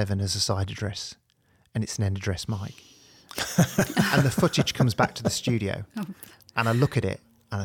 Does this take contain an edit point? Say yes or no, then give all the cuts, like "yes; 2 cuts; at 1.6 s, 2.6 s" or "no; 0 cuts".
no; 0 cuts